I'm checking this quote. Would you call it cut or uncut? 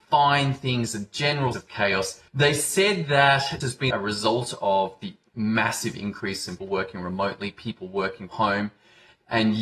cut